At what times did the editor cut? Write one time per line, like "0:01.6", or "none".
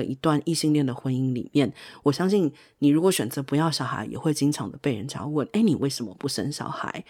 none